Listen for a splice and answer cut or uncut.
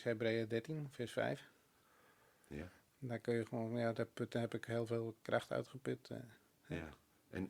uncut